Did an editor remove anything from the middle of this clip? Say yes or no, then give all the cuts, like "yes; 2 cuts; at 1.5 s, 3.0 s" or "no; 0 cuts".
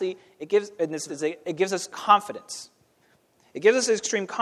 yes; 2 cuts; at 1.1 s, 1.9 s